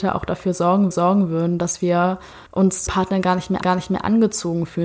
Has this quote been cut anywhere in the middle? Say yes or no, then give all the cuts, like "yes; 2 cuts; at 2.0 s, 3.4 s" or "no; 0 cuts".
yes; 4 cuts; at 0.9 s, 2.5 s, 2.9 s, 3.6 s